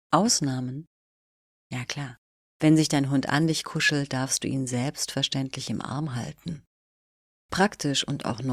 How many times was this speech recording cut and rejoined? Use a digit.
1